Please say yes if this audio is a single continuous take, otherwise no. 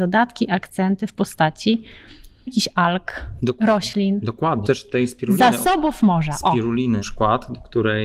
no